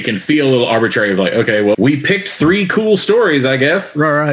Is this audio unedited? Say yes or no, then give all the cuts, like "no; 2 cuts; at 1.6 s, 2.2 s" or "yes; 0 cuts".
no; 1 cut; at 1.7 s